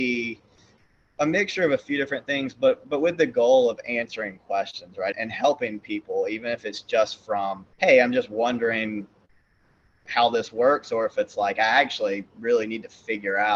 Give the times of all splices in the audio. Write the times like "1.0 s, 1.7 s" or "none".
5.1 s, 7.7 s

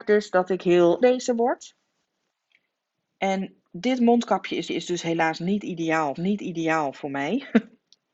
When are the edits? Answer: 1.0 s, 2.3 s, 4.7 s, 6.2 s

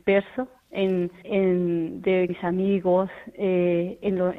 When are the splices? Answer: 1.2 s, 2.3 s

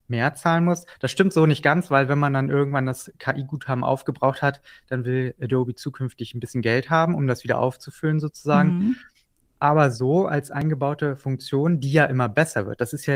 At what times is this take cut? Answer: none

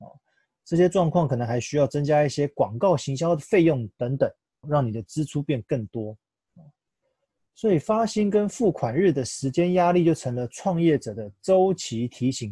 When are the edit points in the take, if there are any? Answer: 4.6 s

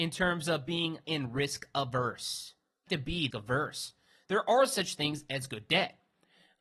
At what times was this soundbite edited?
1.0 s, 2.9 s, 3.3 s

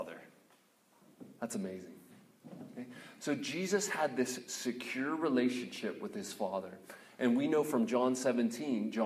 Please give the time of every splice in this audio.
none

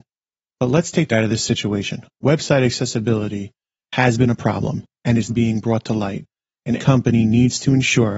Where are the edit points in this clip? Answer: 1.1 s, 5.3 s, 6.8 s

